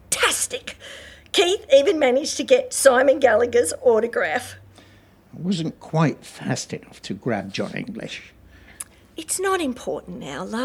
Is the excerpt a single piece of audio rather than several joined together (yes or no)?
yes